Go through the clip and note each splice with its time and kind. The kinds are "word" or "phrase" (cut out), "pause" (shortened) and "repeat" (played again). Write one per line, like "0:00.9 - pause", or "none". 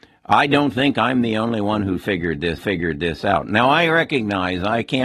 0:02.6 - repeat